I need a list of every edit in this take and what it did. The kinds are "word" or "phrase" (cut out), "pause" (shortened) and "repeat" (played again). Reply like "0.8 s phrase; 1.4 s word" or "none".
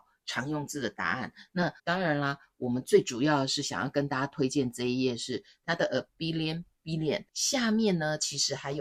1.8 s pause; 6.1 s word; 7.3 s pause

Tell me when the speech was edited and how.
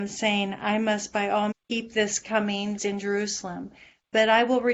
1.5 s word; 2.8 s word

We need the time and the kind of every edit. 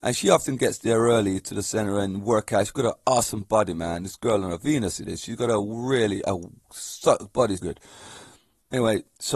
7.6 s word

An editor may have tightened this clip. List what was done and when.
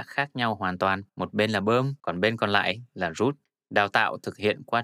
1.1 s pause; 2.0 s pause; 3.4 s pause

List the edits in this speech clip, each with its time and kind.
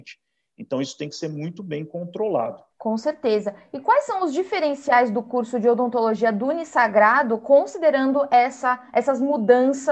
2.7 s pause

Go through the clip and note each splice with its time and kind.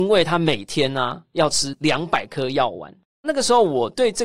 none

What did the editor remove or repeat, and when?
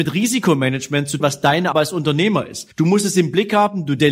1.2 s word; 1.7 s word; 2.7 s pause

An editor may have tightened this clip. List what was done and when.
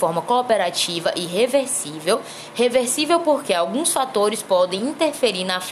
none

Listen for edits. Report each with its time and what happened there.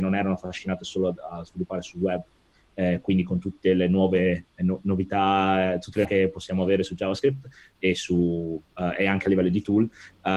6.0 s word

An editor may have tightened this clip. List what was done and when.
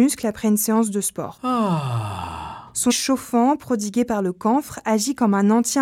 2.9 s word

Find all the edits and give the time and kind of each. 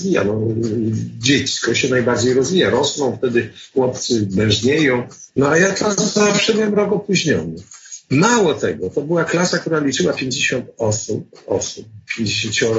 5.3 s pause

